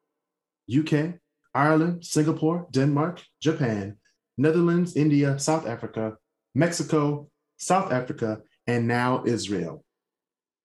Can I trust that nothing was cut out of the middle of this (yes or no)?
yes